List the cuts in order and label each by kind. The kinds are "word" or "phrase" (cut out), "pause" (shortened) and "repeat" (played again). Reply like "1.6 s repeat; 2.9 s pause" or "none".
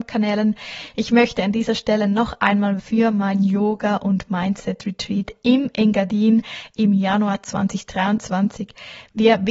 2.8 s phrase